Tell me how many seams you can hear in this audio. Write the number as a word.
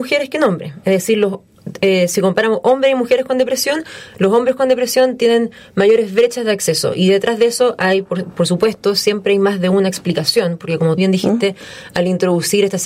one